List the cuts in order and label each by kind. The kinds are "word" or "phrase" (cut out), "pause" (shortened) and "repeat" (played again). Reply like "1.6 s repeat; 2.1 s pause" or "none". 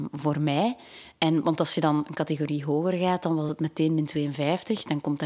none